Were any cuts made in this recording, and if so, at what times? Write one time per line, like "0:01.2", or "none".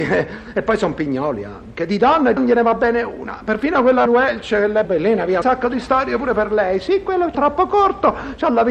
0:02.4
0:04.1
0:04.8
0:05.4
0:07.3